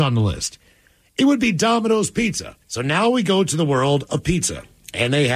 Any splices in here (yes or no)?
yes